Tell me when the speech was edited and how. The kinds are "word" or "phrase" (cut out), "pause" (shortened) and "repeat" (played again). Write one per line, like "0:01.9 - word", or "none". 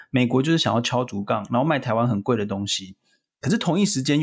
none